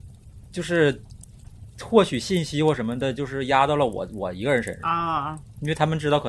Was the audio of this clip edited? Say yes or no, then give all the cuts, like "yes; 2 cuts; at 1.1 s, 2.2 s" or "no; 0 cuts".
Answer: no; 0 cuts